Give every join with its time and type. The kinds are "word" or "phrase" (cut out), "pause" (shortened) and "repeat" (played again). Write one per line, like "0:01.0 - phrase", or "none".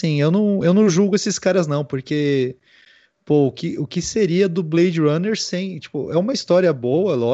none